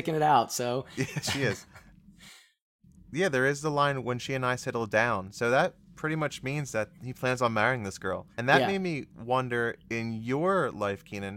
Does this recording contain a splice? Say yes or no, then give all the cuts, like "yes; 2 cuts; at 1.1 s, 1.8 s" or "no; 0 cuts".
yes; 3 cuts; at 7.0 s, 8.3 s, 9.9 s